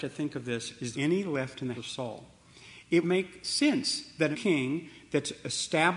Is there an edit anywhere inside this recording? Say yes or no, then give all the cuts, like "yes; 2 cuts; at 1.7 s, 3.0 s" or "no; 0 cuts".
yes; 4 cuts; at 0.9 s, 1.7 s, 3.0 s, 4.3 s